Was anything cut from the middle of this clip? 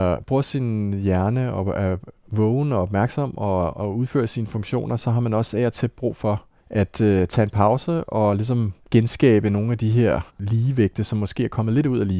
yes; 3 cuts; at 6.6 s, 8.8 s, 10.3 s

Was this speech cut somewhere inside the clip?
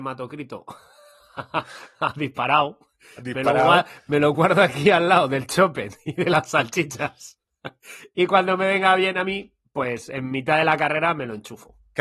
no; 0 cuts

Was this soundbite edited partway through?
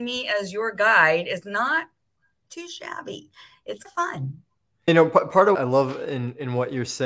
yes; 3 cuts; at 3.8 s, 4.9 s, 5.5 s

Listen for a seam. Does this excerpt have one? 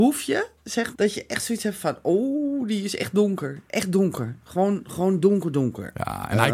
yes; 1 cut; at 0.9 s

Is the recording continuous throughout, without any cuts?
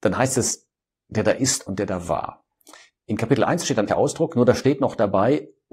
no; 1 cut; at 3.9 s

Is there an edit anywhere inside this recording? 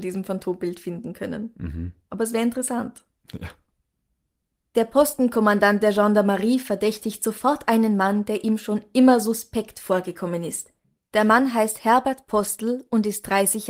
no; 0 cuts

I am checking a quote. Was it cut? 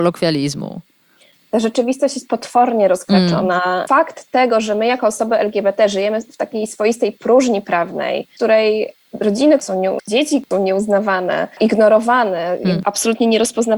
yes; 1 cut; at 10.0 s

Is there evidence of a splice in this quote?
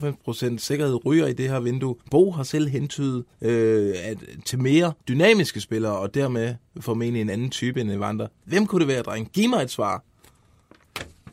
yes; 3 cuts; at 2.0 s, 3.3 s, 5.0 s

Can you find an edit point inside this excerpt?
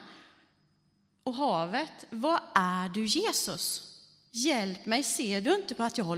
no; 0 cuts

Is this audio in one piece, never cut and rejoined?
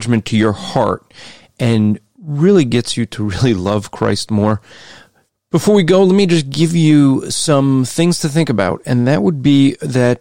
yes; 0 cuts

